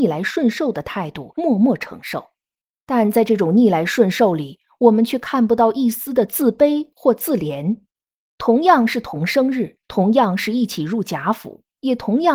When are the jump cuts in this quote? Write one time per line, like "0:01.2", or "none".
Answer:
0:09.8